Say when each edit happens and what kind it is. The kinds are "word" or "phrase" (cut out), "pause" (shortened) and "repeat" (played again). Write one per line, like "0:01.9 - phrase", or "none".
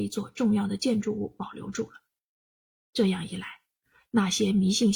none

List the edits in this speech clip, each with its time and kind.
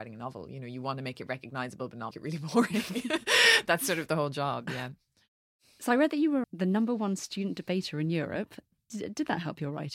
0:02.1 - word
0:06.4 - word

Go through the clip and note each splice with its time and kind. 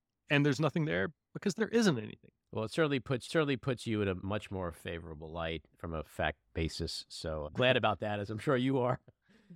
0:02.4 - pause
0:03.3 - repeat
0:06.4 - pause
0:07.5 - word

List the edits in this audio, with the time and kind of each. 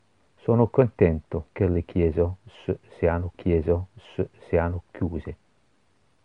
0:01.5 - pause
0:03.3 - repeat

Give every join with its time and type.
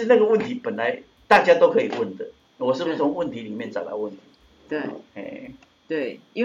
none

